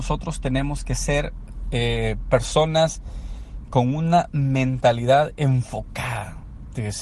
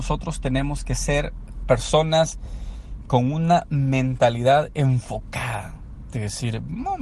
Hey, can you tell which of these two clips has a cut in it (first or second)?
second